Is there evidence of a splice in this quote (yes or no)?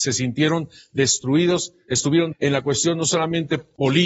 yes